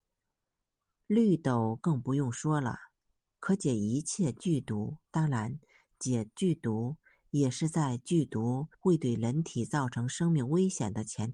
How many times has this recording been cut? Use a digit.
2